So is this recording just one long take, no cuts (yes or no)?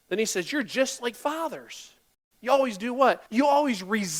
no